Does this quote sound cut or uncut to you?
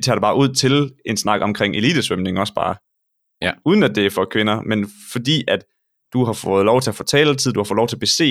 uncut